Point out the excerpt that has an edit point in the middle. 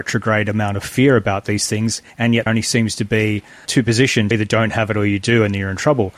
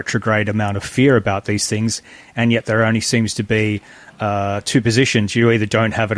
first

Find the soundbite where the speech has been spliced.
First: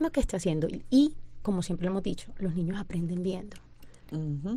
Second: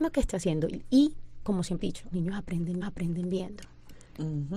second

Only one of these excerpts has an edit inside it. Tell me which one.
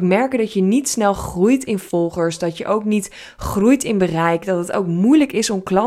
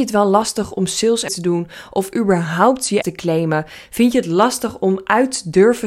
second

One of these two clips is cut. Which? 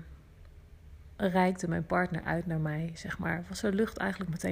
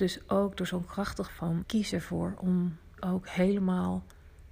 second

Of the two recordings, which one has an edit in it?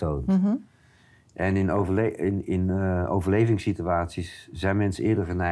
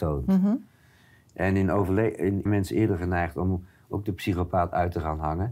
second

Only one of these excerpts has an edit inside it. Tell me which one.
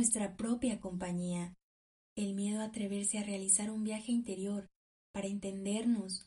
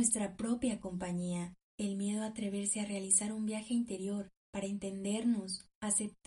second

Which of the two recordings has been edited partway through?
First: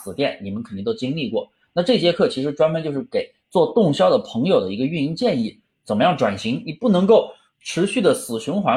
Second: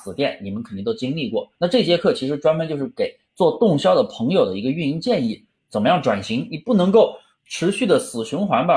second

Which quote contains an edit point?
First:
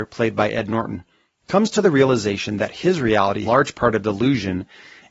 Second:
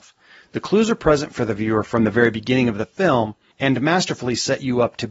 first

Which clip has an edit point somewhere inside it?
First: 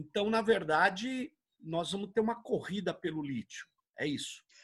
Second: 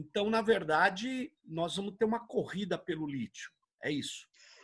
second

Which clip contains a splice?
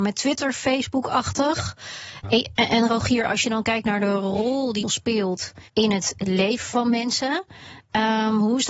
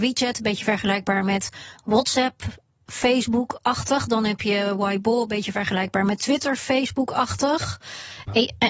first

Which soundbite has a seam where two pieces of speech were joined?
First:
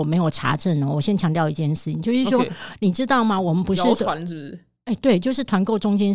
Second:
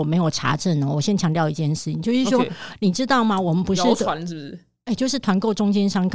second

